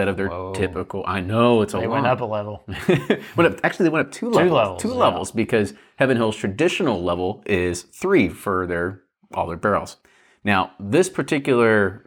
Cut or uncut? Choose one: uncut